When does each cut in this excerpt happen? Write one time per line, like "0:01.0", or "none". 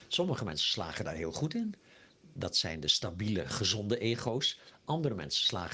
none

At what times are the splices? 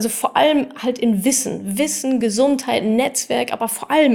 none

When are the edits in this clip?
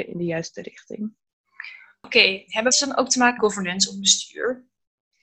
0:02.7
0:03.4

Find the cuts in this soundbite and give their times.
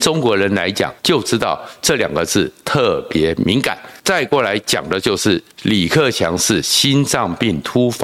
0:01.0
0:04.0
0:05.5

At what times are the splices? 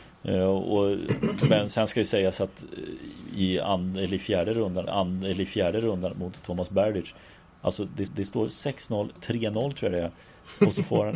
0:01.7
0:04.9
0:08.1

